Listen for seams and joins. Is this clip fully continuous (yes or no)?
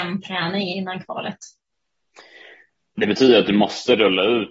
yes